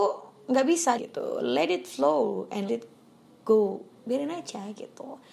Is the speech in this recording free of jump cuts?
no; 2 cuts; at 1.0 s, 2.7 s

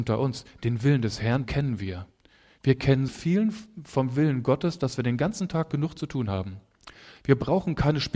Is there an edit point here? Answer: yes; 2 cuts; at 1.4 s, 3.1 s

